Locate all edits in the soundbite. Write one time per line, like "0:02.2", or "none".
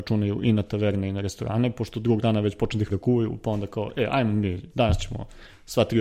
0:02.2
0:02.9